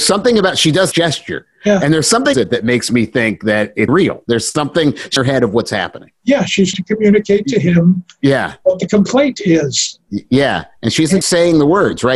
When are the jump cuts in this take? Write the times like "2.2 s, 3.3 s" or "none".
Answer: 0.9 s, 2.3 s, 3.9 s, 5.2 s, 6.7 s, 11.2 s